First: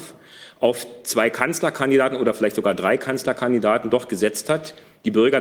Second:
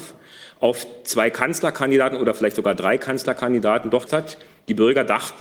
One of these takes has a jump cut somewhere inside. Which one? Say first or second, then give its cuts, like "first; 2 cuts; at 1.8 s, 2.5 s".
second; 1 cut; at 4.1 s